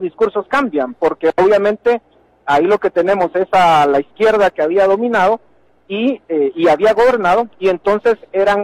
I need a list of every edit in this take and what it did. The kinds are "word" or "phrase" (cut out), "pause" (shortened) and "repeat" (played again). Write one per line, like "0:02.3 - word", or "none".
none